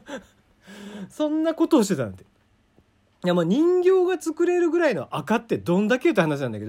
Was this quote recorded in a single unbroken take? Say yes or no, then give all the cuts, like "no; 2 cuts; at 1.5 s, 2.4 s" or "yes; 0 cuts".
yes; 0 cuts